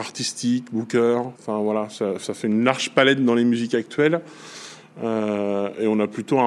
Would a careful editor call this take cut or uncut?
cut